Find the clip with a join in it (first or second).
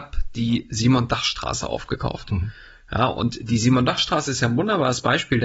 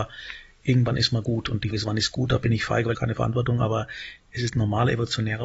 second